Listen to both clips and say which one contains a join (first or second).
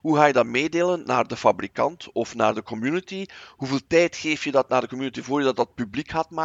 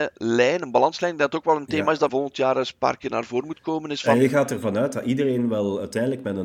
second